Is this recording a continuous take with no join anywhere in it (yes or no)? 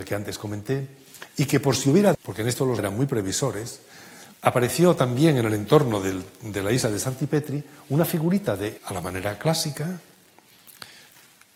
no